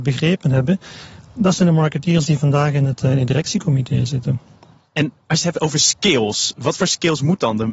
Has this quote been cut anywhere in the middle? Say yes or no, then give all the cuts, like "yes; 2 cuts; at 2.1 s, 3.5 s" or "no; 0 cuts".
no; 0 cuts